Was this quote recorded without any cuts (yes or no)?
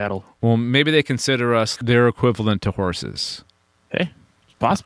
no